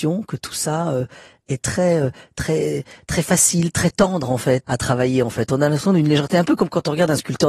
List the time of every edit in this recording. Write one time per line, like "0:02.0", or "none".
0:04.6